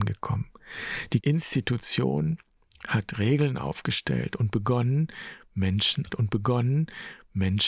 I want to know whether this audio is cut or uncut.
cut